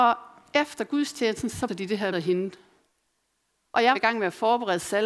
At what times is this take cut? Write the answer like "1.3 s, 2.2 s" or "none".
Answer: 1.7 s, 2.1 s, 3.9 s